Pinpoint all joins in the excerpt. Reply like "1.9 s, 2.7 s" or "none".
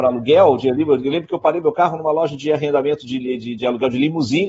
none